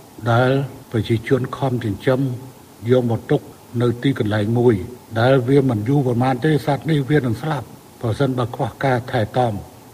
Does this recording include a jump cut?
no; 0 cuts

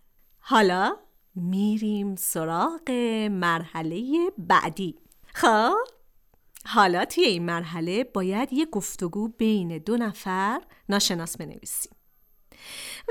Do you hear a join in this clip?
no; 0 cuts

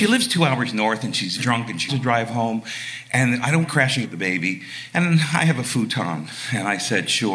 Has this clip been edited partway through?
yes; 4 cuts; at 1.4 s, 1.9 s, 3.6 s, 4.0 s

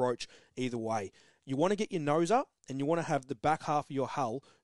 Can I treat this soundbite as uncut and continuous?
yes; 0 cuts

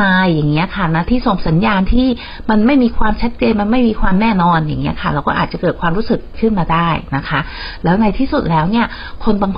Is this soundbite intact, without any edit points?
no; 1 cut; at 6.3 s

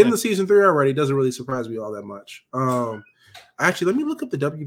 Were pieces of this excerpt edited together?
no; 0 cuts

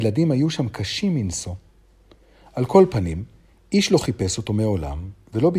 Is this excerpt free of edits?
yes; 0 cuts

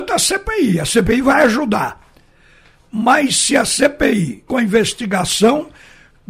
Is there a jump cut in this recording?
yes; 1 cut; at 4.5 s

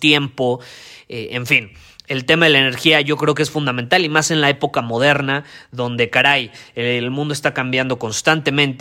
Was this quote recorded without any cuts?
yes; 0 cuts

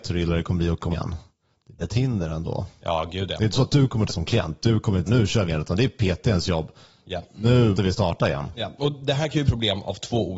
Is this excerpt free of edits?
no; 7 cuts; at 0.9 s, 1.8 s, 4.1 s, 5.1 s, 5.5 s, 7.7 s, 9.5 s

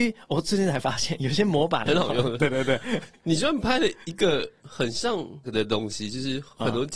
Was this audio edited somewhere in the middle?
yes; 2 cuts; at 1.9 s, 5.4 s

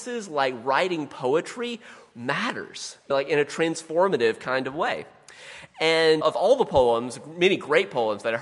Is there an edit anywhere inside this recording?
yes; 3 cuts; at 2.1 s, 3.1 s, 6.2 s

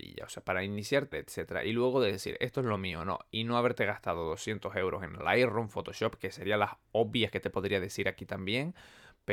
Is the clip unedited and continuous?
no; 1 cut; at 1.1 s

